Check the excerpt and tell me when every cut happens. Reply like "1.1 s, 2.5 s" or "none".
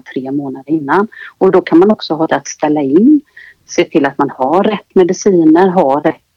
2.3 s